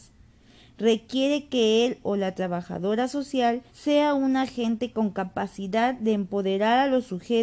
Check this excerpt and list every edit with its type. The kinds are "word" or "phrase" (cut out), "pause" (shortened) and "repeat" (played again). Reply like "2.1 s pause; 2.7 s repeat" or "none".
3.7 s pause

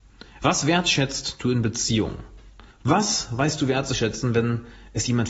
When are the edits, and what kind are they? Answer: 2.7 s pause

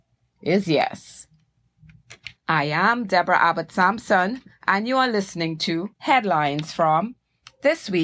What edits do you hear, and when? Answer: 2.4 s pause; 5.9 s pause

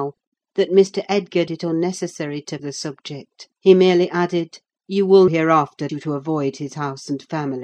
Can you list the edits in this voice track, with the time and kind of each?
1.5 s word; 2.6 s word; 3.5 s pause; 4.7 s pause; 5.3 s word; 5.9 s phrase

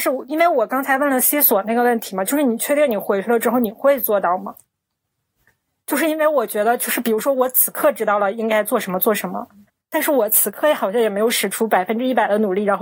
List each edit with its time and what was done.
9.7 s pause

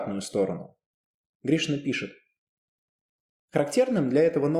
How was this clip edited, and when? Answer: none

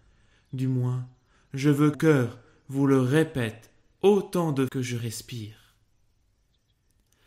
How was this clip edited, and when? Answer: 1.9 s word; 4.7 s word

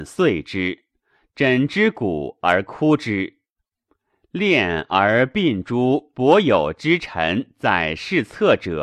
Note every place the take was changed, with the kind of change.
none

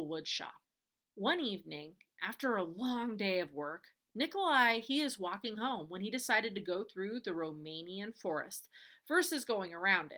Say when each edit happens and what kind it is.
none

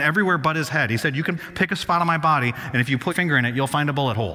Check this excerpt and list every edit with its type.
1.4 s word; 3.1 s word

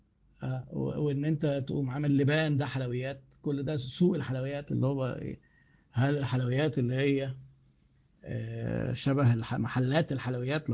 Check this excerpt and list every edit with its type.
none

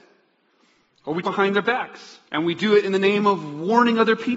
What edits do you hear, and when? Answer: 1.2 s word; 2.3 s pause

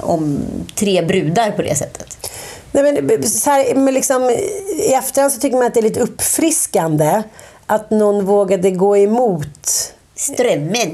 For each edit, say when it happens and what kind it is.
none

